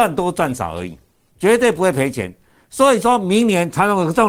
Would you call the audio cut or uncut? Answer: uncut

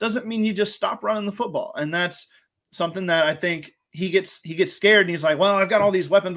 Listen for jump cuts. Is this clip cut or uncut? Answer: uncut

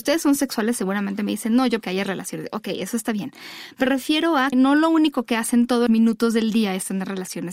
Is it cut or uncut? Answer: cut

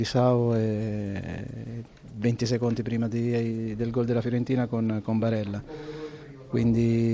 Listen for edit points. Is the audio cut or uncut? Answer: uncut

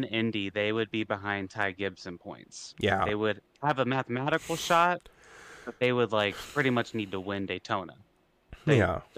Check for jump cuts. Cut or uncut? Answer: uncut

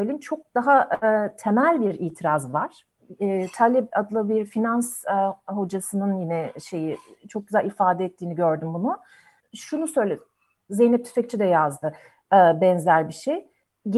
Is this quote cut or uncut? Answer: uncut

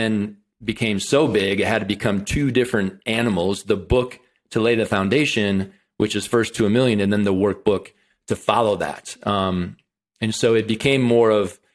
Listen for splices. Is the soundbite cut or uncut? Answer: uncut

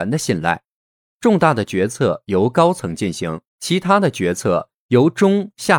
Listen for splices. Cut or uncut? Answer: cut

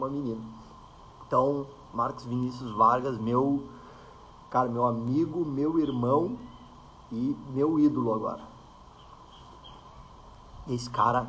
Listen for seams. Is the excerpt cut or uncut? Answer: uncut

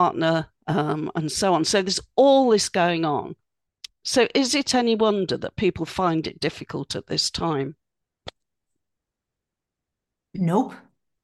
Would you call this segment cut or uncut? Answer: uncut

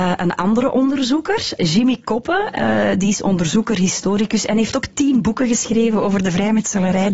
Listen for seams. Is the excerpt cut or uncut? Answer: cut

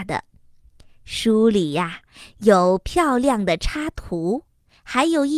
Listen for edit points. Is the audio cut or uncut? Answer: uncut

